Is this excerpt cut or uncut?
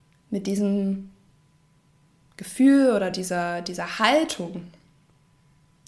uncut